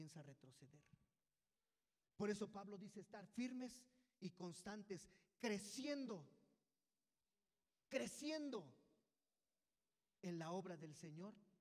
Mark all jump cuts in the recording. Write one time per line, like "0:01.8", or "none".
none